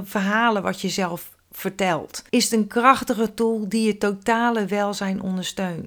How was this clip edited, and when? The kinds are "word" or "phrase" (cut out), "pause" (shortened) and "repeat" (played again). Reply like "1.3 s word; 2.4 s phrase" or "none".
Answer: 2.3 s pause